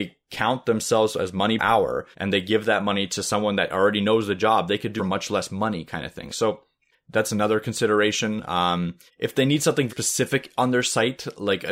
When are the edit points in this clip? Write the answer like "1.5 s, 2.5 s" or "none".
1.6 s, 2.1 s, 5.0 s, 6.3 s, 6.9 s, 9.1 s, 9.9 s